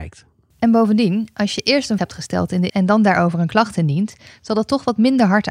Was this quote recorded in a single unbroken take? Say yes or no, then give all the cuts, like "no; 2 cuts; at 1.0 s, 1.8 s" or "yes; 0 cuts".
no; 2 cuts; at 2.0 s, 2.7 s